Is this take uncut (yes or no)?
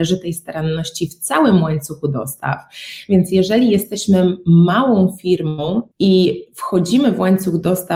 no